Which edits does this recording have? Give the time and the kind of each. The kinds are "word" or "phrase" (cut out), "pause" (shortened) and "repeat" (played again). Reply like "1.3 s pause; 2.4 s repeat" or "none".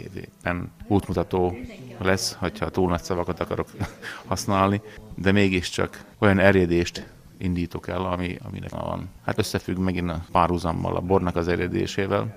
6.1 s pause; 8.7 s word; 9.3 s word